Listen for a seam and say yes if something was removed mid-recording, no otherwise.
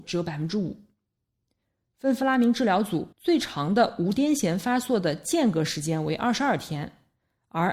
yes